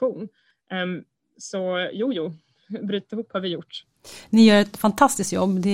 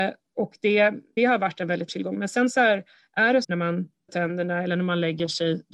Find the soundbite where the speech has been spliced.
second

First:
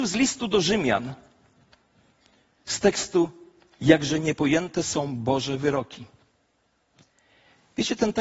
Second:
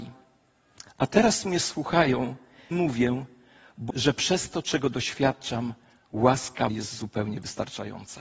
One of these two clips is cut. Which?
second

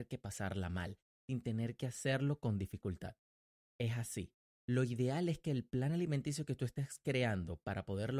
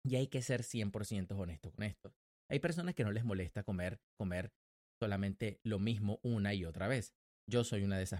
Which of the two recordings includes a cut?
second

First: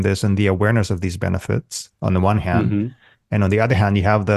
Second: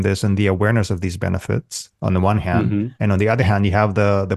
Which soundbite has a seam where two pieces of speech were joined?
second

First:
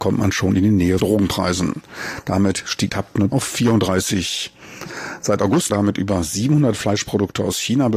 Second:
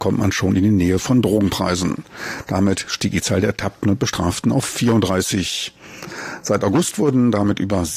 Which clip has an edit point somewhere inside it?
first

